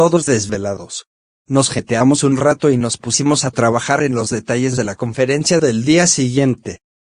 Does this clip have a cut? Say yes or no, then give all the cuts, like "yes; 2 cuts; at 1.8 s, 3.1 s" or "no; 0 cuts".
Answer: yes; 1 cut; at 1.2 s